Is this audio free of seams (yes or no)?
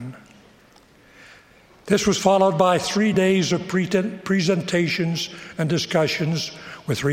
yes